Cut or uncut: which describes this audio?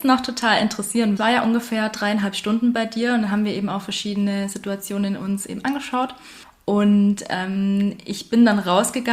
cut